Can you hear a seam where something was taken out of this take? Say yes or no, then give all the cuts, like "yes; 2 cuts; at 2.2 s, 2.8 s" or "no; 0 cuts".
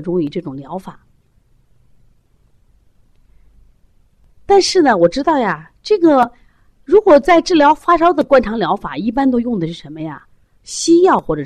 no; 0 cuts